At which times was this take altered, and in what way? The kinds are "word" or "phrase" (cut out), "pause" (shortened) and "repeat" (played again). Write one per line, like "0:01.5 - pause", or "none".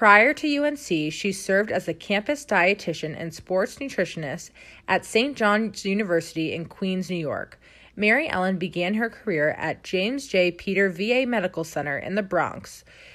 none